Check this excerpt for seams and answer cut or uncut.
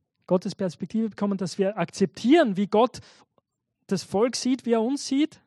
uncut